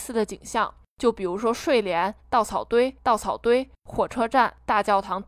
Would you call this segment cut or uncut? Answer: cut